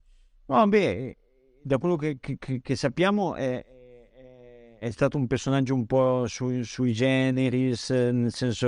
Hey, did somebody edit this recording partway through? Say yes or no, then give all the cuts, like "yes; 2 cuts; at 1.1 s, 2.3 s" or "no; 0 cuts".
no; 0 cuts